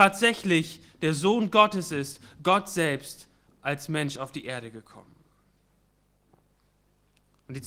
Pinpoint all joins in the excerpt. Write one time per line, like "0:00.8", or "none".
none